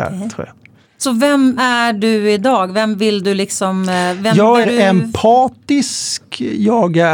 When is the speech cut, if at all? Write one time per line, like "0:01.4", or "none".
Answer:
0:01.6
0:04.6